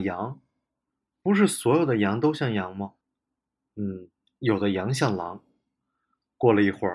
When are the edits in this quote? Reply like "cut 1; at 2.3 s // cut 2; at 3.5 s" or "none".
cut 1; at 3.0 s